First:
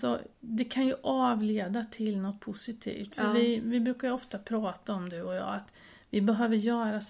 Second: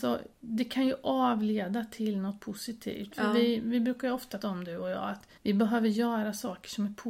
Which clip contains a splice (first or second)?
second